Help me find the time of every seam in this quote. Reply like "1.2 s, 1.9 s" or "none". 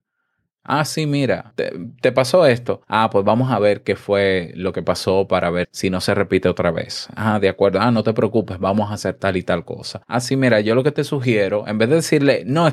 1.5 s, 2.8 s, 5.6 s, 10.0 s

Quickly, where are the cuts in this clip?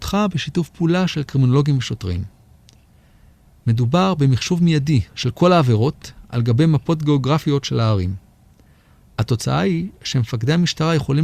none

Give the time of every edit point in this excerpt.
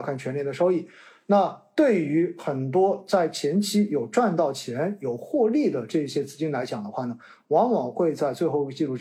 none

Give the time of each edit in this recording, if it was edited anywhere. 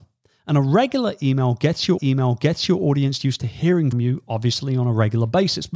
2.0 s, 3.9 s

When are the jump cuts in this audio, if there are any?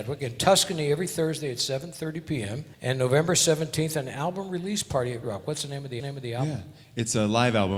2.7 s, 5.2 s, 6.0 s

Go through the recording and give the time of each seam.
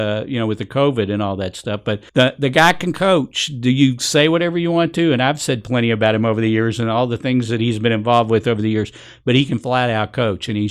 2.1 s

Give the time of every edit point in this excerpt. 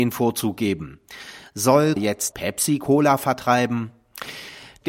2.0 s, 2.3 s

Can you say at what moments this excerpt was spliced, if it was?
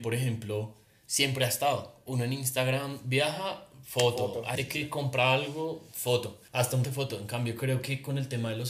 4.6 s, 6.5 s, 6.8 s

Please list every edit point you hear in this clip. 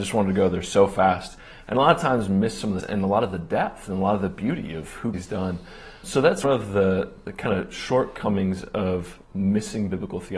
2.8 s, 5.1 s, 6.0 s, 6.4 s, 9.2 s

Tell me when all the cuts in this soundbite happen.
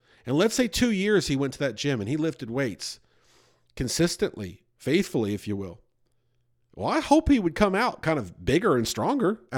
none

